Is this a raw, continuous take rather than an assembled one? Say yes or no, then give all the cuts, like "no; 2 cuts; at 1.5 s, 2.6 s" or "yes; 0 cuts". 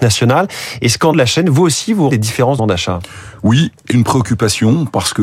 no; 4 cuts; at 1.1 s, 2.1 s, 2.6 s, 3.9 s